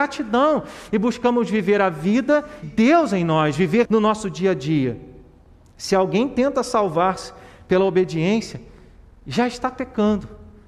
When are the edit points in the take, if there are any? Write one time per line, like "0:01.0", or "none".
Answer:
0:02.6
0:03.8